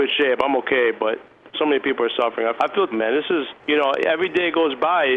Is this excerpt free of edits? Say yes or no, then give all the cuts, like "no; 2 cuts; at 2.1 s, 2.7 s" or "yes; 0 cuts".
no; 4 cuts; at 1.5 s, 2.6 s, 2.9 s, 3.6 s